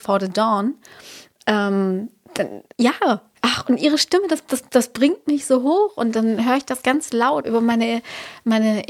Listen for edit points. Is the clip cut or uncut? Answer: cut